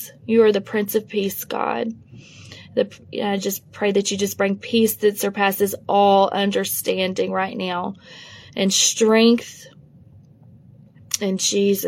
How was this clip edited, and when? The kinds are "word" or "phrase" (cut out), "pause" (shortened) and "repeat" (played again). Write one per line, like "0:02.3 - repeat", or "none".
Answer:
none